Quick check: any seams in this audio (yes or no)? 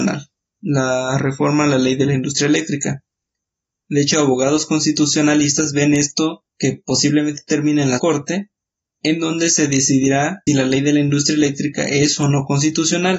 yes